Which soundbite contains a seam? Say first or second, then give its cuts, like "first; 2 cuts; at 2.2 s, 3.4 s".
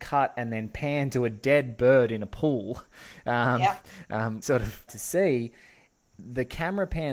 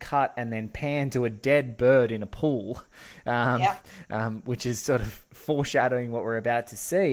first; 2 cuts; at 4.4 s, 4.9 s